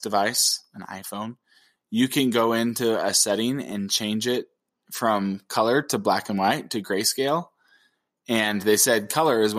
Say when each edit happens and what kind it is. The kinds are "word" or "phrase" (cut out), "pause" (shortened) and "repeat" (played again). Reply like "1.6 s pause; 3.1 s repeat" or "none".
none